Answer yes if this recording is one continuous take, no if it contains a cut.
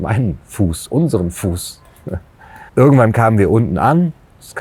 no